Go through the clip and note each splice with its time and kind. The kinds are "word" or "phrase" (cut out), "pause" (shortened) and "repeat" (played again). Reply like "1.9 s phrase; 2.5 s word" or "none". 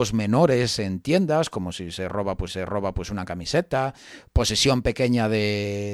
2.5 s repeat